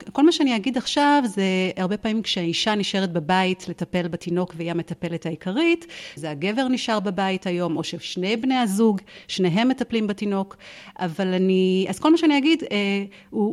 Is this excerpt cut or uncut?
cut